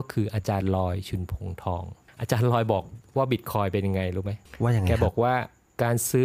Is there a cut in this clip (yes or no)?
no